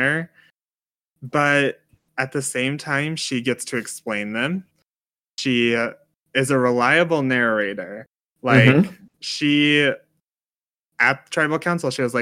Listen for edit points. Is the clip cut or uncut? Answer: uncut